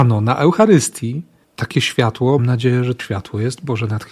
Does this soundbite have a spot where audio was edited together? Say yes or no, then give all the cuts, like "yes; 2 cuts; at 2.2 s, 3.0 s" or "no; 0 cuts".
yes; 3 cuts; at 1.4 s, 2.4 s, 3.0 s